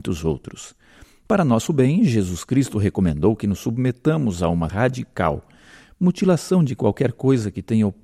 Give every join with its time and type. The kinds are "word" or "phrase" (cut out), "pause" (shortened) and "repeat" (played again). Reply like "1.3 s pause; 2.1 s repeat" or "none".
4.7 s word